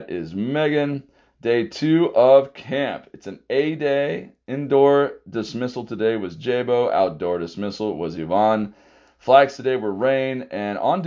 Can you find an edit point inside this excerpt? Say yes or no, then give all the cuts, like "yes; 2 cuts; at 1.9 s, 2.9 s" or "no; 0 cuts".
no; 0 cuts